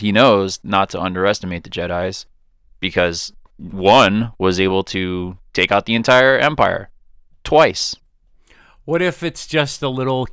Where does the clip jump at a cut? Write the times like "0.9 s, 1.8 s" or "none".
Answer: none